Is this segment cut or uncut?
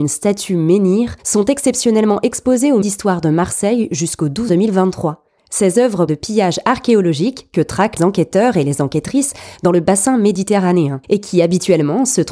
cut